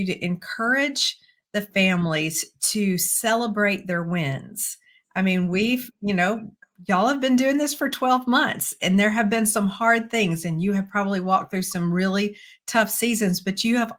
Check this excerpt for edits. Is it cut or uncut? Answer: uncut